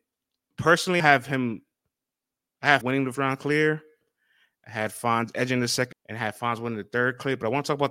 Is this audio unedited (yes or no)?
no